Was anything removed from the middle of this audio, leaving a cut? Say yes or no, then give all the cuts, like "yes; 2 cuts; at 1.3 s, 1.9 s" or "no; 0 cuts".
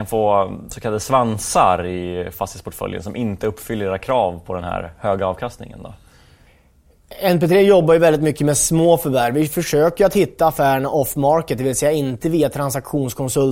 no; 0 cuts